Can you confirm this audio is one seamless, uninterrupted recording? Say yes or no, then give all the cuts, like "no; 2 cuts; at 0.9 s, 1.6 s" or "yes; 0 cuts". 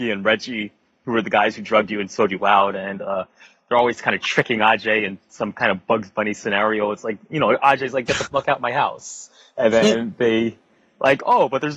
yes; 0 cuts